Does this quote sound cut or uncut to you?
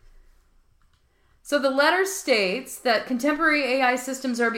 uncut